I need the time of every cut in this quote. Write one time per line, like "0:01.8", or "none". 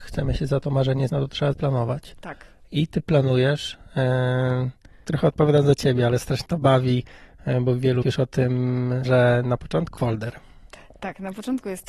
0:01.1
0:01.5
0:05.0
0:06.5
0:08.0
0:09.1
0:10.0